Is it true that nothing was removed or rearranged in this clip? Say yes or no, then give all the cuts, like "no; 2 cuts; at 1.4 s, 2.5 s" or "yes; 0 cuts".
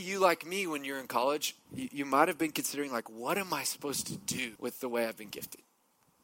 no; 1 cut; at 4.5 s